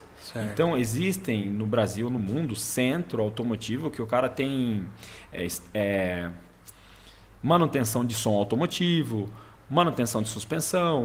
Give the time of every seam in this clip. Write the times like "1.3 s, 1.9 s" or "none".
none